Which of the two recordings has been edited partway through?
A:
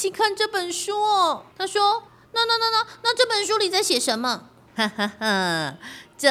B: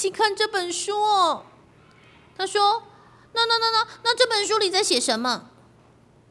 A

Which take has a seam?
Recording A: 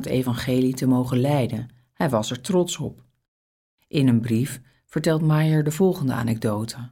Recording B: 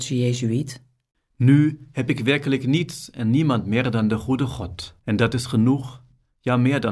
B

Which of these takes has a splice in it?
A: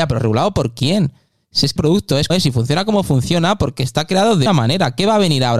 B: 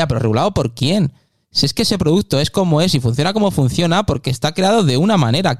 A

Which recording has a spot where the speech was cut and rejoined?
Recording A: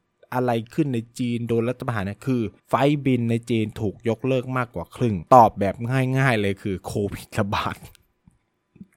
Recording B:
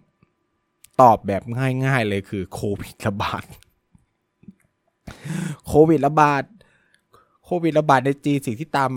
A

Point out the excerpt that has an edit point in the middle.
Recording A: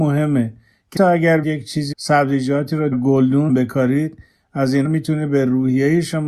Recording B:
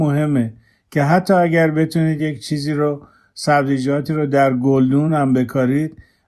A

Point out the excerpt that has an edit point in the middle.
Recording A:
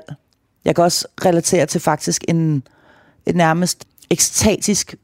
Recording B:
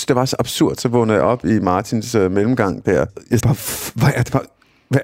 B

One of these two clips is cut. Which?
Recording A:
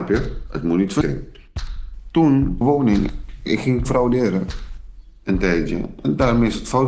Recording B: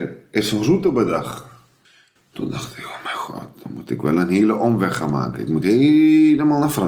A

